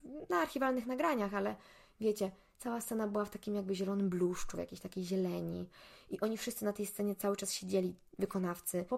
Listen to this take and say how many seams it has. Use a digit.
0